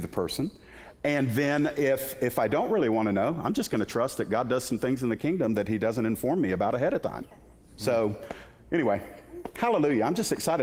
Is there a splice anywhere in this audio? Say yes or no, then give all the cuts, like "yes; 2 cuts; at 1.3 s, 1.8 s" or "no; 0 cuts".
no; 0 cuts